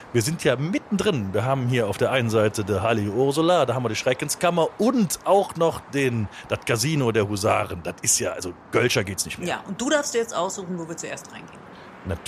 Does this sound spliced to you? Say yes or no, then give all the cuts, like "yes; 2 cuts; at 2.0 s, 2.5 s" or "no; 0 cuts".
no; 0 cuts